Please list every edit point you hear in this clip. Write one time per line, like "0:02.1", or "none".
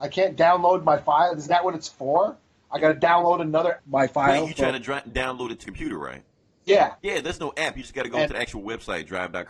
0:03.8
0:05.6
0:07.0